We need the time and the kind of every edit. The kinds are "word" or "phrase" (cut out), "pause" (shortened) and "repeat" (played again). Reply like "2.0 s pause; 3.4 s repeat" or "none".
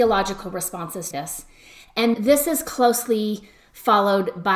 1.1 s word; 2.1 s word